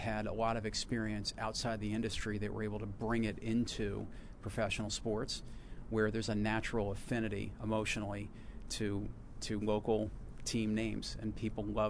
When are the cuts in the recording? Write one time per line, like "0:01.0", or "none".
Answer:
none